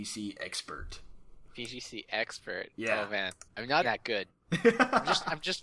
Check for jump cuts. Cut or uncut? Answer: cut